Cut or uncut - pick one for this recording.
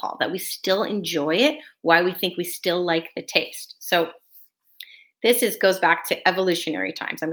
uncut